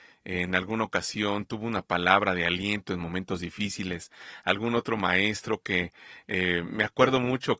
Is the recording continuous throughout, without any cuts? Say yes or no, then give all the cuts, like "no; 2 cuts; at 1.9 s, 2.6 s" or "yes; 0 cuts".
yes; 0 cuts